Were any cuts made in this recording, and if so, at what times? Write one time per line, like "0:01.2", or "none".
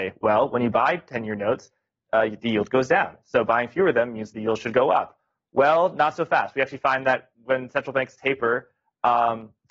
none